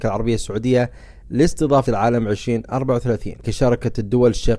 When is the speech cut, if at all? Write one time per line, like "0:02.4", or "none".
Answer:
0:01.9
0:03.4